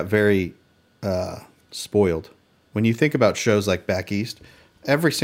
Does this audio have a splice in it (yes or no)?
no